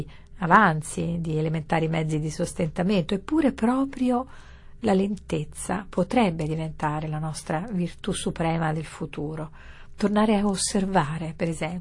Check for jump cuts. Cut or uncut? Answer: uncut